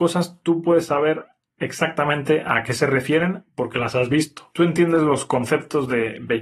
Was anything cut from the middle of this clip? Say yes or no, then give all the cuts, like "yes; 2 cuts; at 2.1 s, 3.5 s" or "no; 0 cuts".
no; 0 cuts